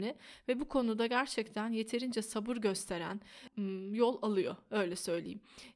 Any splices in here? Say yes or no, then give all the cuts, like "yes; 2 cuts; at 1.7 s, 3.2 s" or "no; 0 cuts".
no; 0 cuts